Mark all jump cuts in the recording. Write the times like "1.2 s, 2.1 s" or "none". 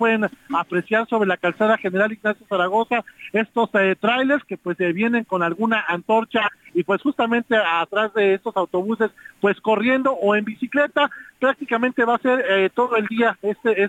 none